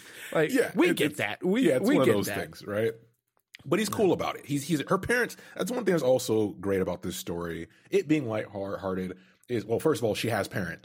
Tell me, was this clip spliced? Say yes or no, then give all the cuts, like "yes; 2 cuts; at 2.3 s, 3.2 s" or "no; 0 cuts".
no; 0 cuts